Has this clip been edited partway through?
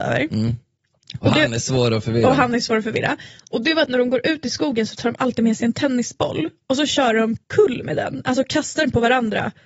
yes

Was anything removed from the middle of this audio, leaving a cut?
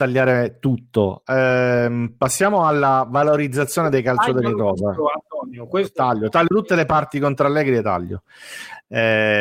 yes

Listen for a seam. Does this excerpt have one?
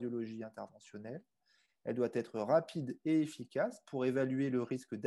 no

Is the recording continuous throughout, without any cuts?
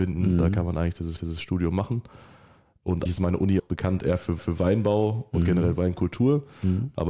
no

